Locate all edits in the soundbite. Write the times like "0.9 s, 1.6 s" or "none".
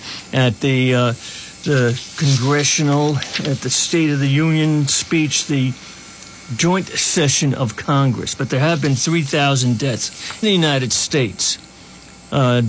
10.4 s